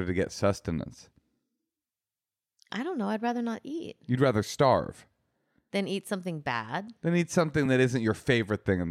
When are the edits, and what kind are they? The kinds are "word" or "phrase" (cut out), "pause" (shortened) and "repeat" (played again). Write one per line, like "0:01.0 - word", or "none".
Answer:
none